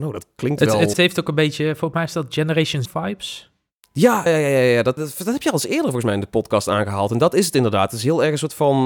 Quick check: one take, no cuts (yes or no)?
no